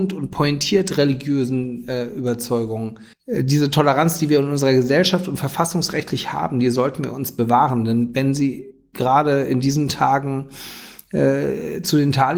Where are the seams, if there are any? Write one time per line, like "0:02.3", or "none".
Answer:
0:03.1